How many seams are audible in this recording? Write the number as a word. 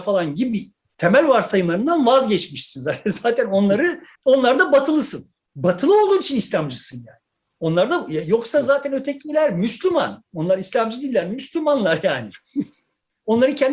two